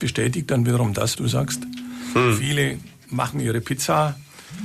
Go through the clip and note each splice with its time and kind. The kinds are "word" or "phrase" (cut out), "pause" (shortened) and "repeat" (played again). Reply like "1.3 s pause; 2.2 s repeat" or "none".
1.1 s word; 3.3 s word

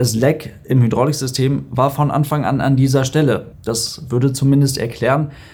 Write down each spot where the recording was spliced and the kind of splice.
3.5 s pause

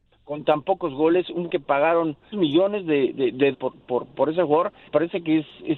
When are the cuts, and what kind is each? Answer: 1.5 s word; 2.3 s word; 3.1 s word; 3.5 s word; 4.9 s word

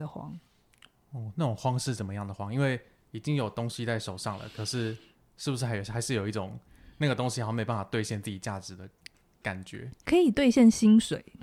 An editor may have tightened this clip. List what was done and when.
none

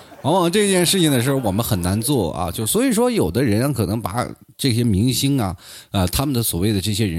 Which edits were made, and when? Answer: none

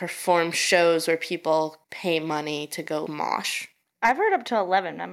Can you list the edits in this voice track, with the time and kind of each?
1.8 s pause; 3.1 s word

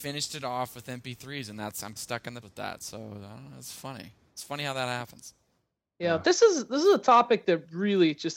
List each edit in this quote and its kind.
2.0 s word; 2.4 s word

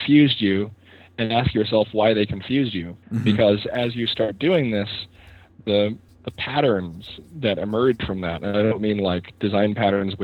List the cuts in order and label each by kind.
3.0 s pause; 6.1 s pause

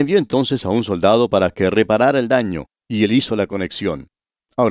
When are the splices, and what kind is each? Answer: 2.8 s pause

